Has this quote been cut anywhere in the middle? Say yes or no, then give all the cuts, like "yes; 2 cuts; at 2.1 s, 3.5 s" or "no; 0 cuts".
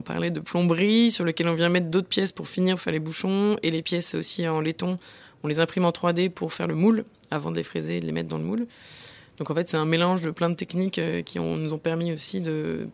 no; 0 cuts